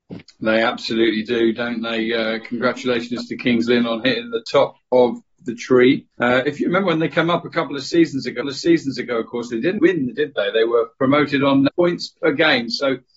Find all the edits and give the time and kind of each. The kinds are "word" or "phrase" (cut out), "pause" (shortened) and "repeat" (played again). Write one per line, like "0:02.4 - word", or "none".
0:06.1 - pause
0:08.4 - repeat
0:09.8 - word
0:10.2 - word
0:11.7 - word